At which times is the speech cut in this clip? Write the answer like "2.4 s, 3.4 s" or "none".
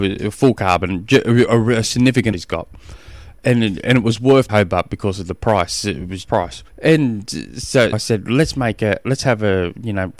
2.3 s, 4.5 s, 6.2 s, 6.7 s, 7.9 s